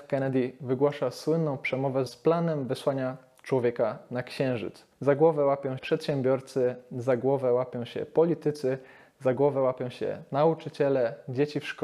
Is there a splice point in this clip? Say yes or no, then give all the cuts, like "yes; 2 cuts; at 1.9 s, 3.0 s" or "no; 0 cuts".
yes; 3 cuts; at 2.1 s, 4.9 s, 5.8 s